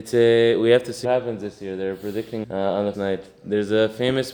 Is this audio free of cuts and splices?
no; 3 cuts; at 1.0 s, 2.4 s, 2.9 s

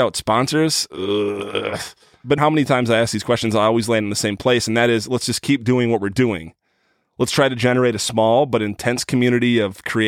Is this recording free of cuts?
no; 1 cut; at 2.4 s

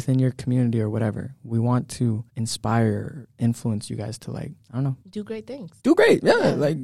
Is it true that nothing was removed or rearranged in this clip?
no; 4 cuts; at 2.3 s, 4.6 s, 5.0 s, 5.8 s

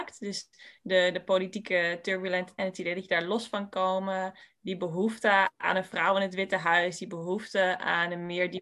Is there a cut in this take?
yes; 1 cut; at 2.6 s

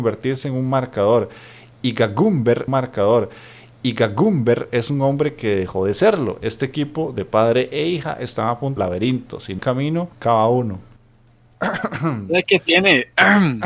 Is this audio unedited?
no; 4 cuts; at 2.7 s, 8.8 s, 9.6 s, 10.1 s

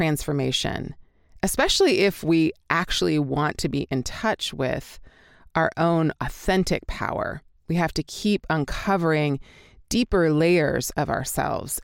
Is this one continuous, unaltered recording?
yes; 0 cuts

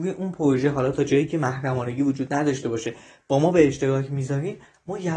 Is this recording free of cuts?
yes; 0 cuts

